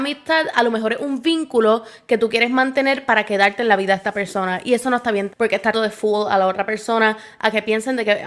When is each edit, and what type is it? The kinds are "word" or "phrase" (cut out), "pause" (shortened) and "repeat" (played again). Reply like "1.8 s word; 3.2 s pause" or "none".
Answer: 5.3 s word; 5.7 s word

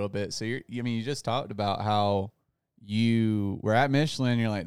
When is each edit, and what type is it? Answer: none

